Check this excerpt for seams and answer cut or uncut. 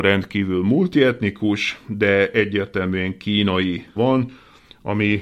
cut